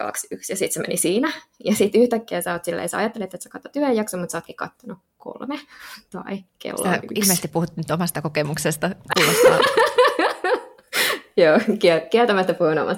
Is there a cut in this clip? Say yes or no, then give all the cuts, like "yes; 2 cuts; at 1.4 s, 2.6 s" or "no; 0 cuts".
yes; 2 cuts; at 5.1 s, 6.5 s